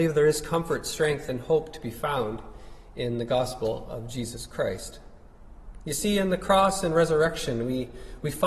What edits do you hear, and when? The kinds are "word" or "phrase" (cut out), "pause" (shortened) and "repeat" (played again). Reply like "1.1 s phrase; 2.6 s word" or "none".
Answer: none